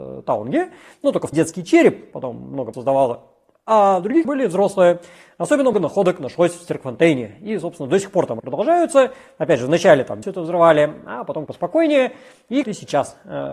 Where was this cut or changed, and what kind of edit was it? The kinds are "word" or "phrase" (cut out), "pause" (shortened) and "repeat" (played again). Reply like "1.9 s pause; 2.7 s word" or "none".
1.3 s word; 2.1 s word; 2.7 s word; 4.2 s word; 5.7 s word; 8.4 s word; 10.2 s word; 11.5 s word; 12.6 s word